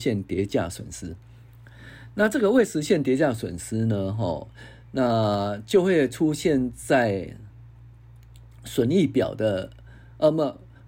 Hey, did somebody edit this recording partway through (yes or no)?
no